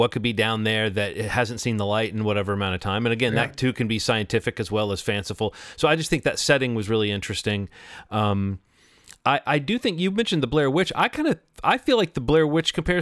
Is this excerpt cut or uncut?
uncut